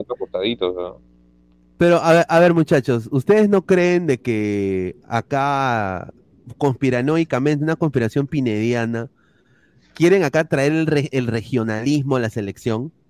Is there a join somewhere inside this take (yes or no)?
no